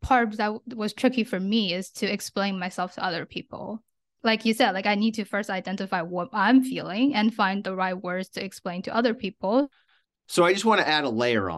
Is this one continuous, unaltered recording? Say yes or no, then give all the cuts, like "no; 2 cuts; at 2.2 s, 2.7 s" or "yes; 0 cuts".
yes; 0 cuts